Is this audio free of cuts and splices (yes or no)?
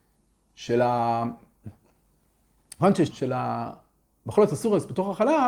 no